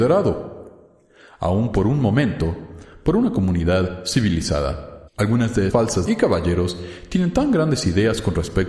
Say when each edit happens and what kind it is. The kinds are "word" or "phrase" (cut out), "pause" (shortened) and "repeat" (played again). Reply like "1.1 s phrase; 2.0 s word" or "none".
5.1 s pause; 5.7 s word; 6.0 s word